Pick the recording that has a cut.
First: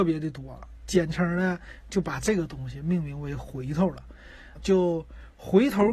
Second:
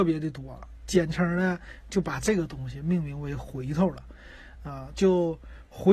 first; 1 cut; at 4.6 s

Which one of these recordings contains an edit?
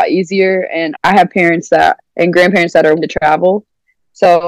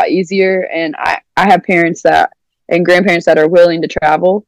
first; 3 cuts; at 1.0 s, 2.1 s, 3.0 s

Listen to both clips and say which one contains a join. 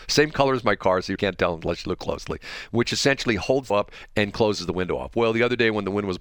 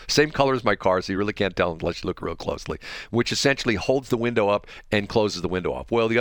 first; 3 cuts; at 1.2 s, 2.0 s, 3.7 s

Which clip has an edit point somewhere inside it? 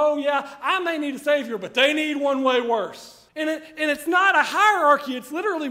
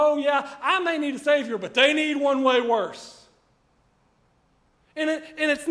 first; 1 cut; at 3.3 s

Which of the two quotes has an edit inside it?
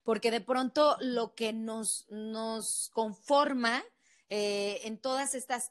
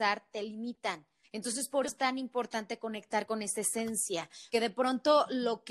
second; 3 cuts; at 1.2 s, 1.8 s, 4.5 s

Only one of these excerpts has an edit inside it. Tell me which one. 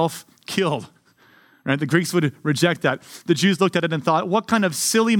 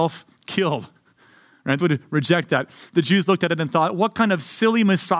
second; 1 cut; at 1.8 s

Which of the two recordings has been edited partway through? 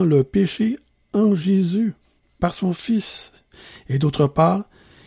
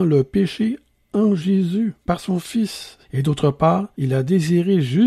second; 3 cuts; at 2.0 s, 3.0 s, 3.9 s

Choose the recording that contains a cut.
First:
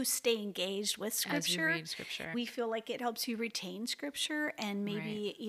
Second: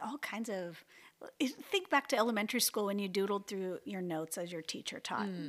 first; 1 cut; at 2.3 s

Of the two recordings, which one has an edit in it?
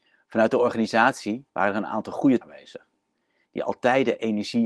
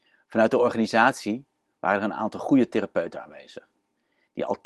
first; 2 cuts; at 1.5 s, 2.4 s

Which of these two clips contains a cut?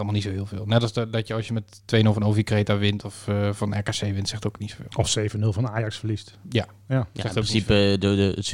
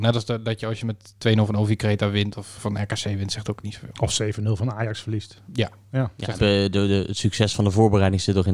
second; 2 cuts; at 2.6 s, 6.4 s

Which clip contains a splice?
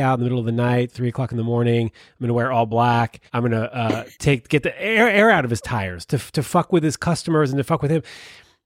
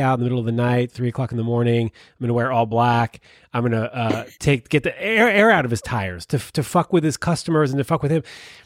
first; 1 cut; at 3.3 s

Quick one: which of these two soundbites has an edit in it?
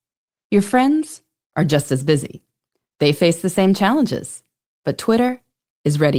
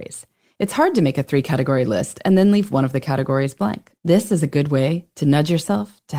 second; 1 cut; at 4.0 s

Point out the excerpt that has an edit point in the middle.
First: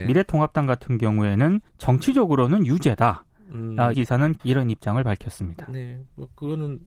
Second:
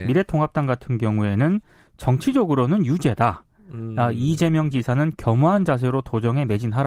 first; 3 cuts; at 1.7 s, 3.9 s, 4.4 s

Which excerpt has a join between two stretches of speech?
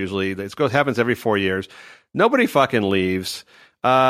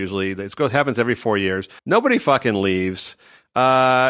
second; 1 cut; at 1.8 s

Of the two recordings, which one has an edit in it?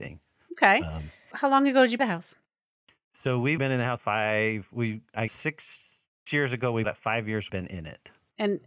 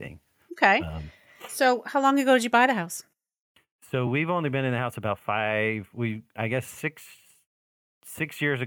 first; 8 cuts; at 1.3 s, 2.0 s, 3.6 s, 4.0 s, 5.3 s, 6.3 s, 6.8 s, 7.5 s

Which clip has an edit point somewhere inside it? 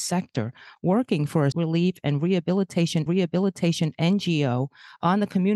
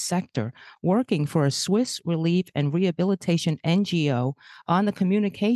first; 2 cuts; at 1.5 s, 3.1 s

